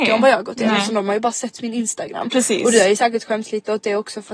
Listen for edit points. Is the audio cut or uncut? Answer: uncut